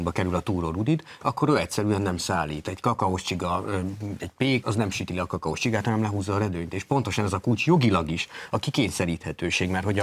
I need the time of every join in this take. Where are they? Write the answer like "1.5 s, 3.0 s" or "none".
4.6 s